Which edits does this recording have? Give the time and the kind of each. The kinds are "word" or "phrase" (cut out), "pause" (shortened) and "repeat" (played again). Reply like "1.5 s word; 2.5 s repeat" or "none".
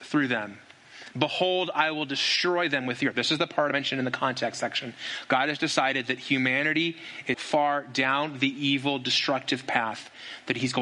7.3 s word

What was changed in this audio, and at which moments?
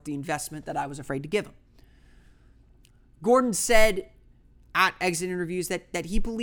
none

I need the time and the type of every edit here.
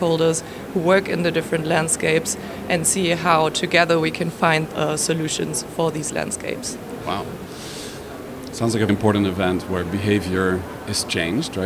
4.7 s phrase; 8.9 s word

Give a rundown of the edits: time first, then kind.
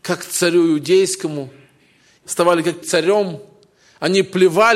2.2 s phrase; 2.8 s word

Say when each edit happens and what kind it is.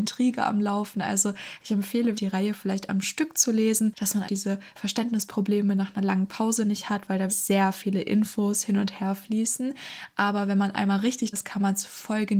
2.1 s word; 4.2 s word; 7.3 s word; 11.3 s word

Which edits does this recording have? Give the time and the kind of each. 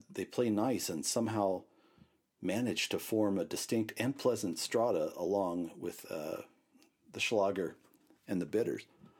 none

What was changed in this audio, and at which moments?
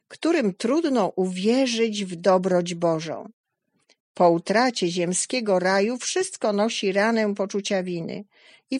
none

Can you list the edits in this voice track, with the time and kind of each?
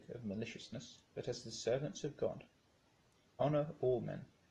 1.1 s pause

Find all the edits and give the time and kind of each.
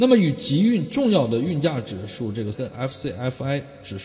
2.5 s word

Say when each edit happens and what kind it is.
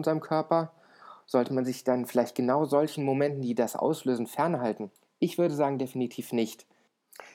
5.0 s pause

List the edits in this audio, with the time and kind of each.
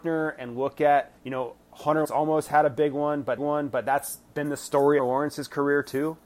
1.2 s pause; 2.0 s word; 3.4 s repeat; 5.0 s phrase

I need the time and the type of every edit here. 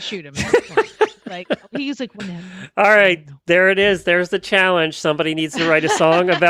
2.2 s word

